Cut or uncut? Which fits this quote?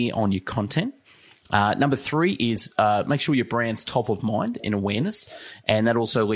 uncut